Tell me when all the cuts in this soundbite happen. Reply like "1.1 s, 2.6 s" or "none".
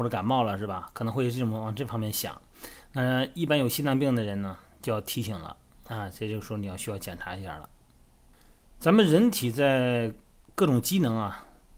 none